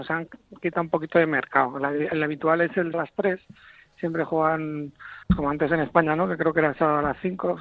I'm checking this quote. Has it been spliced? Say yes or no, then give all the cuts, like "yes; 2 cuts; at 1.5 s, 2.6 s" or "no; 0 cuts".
yes; 2 cuts; at 2.9 s, 5.2 s